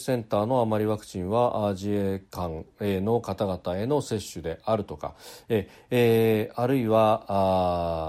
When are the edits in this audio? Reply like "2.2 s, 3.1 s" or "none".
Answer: none